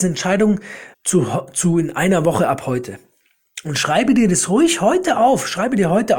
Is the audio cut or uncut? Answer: cut